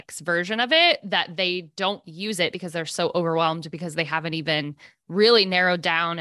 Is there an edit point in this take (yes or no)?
no